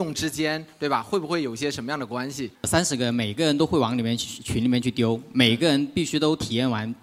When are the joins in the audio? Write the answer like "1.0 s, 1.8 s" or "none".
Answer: 2.6 s